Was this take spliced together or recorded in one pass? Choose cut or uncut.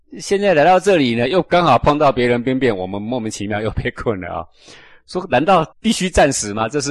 cut